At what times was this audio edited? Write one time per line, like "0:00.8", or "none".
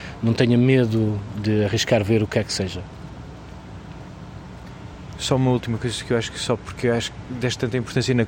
none